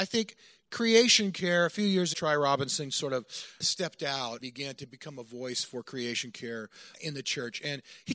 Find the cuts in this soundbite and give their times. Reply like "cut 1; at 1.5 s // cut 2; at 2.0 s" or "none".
cut 1; at 2.1 s // cut 2; at 3.6 s // cut 3; at 4.4 s // cut 4; at 6.9 s

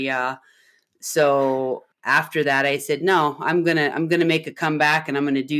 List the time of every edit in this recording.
cut 1; at 1.9 s

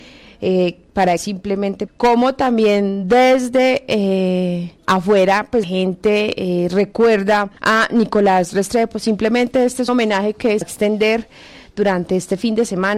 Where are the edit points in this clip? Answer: cut 1; at 1.2 s // cut 2; at 1.9 s // cut 3; at 4.8 s // cut 4; at 5.6 s // cut 5; at 7.6 s // cut 6; at 9.9 s // cut 7; at 10.6 s

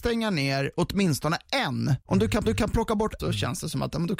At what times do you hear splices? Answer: cut 1; at 2.0 s // cut 2; at 2.5 s // cut 3; at 3.2 s

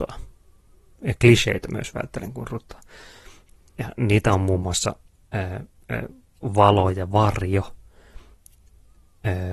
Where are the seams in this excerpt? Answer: none

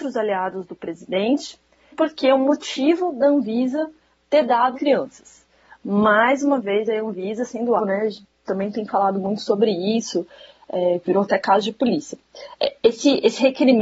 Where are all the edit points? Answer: cut 1; at 1.9 s // cut 2; at 4.7 s // cut 3; at 7.8 s

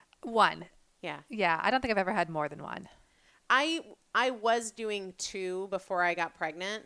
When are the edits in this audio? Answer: none

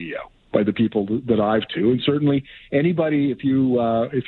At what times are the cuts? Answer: cut 1; at 1.7 s

